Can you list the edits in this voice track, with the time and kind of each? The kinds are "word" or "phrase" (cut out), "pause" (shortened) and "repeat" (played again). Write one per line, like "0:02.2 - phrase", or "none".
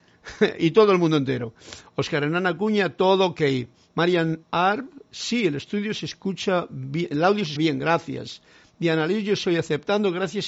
0:04.4 - pause
0:07.6 - word

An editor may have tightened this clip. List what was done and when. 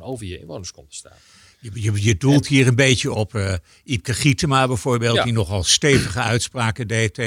none

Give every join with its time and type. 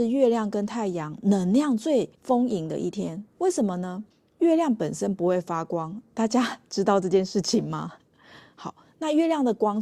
0:02.1 - pause
0:04.1 - pause

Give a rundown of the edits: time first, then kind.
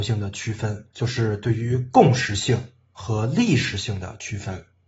0:00.9 - pause

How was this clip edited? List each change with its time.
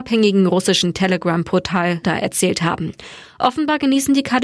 0:02.0 - word

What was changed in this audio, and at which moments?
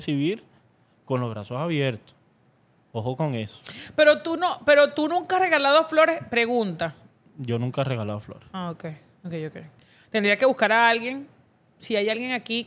none

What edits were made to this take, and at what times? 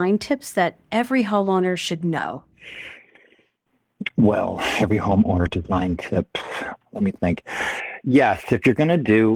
0:05.5 - phrase

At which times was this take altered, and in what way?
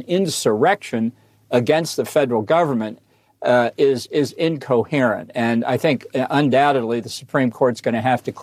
none

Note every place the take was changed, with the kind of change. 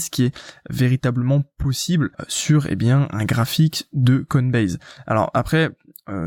0:02.1 - pause

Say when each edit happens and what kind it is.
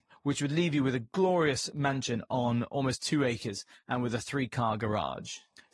none

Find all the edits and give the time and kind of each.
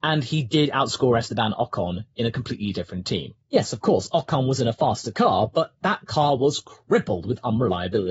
none

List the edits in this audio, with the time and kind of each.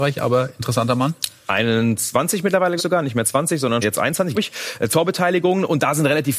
0:02.8 - word
0:03.8 - word
0:04.3 - word
0:04.9 - word

